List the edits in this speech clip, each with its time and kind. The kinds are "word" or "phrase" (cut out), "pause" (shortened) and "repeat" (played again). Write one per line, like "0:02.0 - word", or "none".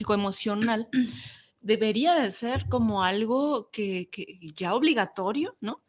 none